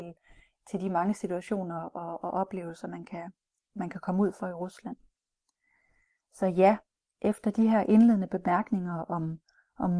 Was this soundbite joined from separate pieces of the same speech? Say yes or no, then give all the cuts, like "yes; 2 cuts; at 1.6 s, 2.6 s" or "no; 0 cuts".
no; 0 cuts